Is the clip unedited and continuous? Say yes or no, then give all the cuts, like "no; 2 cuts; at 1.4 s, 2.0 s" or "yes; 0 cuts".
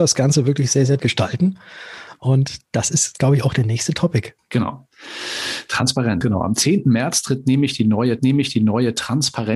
no; 5 cuts; at 1.0 s, 2.6 s, 4.4 s, 6.2 s, 8.2 s